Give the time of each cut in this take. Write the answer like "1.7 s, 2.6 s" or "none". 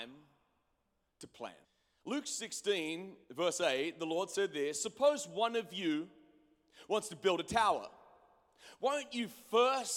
1.6 s, 3.2 s